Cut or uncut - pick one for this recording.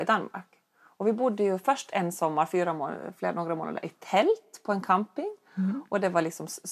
uncut